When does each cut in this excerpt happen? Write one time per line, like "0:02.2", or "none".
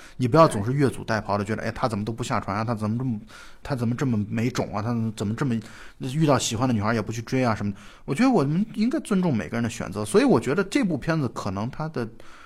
0:03.6